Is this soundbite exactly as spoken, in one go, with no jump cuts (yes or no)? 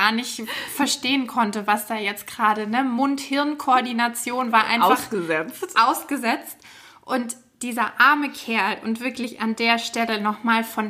yes